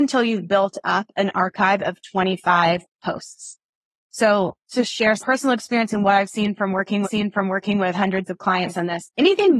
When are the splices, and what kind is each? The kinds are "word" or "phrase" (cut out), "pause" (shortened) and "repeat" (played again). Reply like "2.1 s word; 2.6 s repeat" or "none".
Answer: 4.7 s word; 5.2 s word; 7.0 s repeat

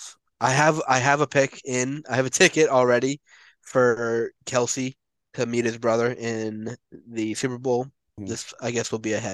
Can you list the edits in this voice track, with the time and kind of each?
8.2 s word

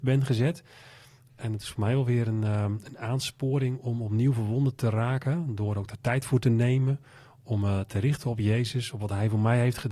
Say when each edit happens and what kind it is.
none

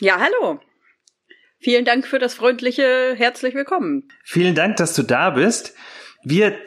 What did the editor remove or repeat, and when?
none

